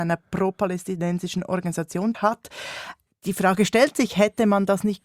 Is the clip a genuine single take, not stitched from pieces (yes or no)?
no